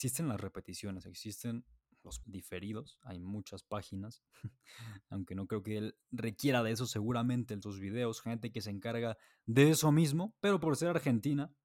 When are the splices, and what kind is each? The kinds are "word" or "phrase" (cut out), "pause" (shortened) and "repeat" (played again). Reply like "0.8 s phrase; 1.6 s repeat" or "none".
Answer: 2.2 s word; 7.6 s word